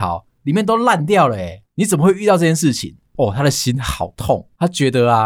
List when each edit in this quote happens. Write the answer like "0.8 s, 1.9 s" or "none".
1.7 s